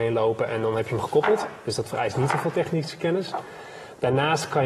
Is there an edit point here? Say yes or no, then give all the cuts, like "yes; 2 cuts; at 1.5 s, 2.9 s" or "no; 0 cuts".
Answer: no; 0 cuts